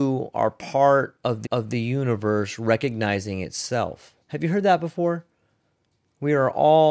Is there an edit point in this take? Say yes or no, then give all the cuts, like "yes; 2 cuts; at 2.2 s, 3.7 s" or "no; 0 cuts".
yes; 2 cuts; at 1.5 s, 4.2 s